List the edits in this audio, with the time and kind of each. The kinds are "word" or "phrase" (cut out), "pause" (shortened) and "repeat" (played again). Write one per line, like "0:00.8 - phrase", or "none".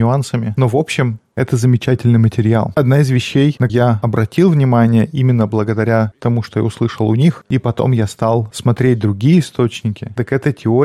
0:03.7 - word